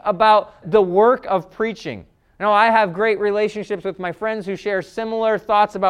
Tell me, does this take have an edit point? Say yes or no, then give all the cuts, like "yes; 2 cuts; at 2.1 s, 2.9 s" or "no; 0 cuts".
no; 0 cuts